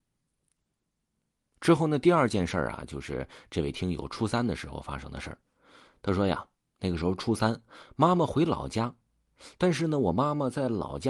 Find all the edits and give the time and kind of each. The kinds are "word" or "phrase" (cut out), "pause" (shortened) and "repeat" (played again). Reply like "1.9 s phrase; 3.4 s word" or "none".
none